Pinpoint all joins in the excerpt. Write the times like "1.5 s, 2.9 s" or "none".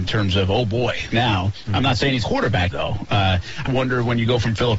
1.1 s, 2.2 s, 2.7 s, 3.7 s